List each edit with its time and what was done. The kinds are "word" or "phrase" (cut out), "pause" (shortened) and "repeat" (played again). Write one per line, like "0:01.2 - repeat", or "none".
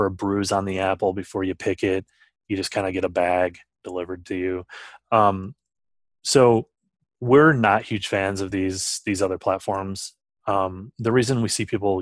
none